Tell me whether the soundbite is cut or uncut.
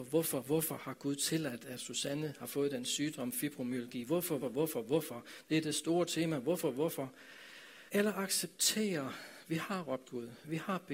cut